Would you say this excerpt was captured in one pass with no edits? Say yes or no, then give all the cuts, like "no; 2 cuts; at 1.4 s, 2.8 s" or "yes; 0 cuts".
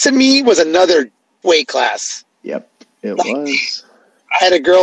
no; 2 cuts; at 1.4 s, 2.3 s